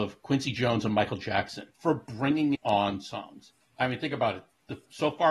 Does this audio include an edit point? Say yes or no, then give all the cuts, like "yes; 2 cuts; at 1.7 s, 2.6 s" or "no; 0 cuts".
yes; 2 cuts; at 1.7 s, 2.5 s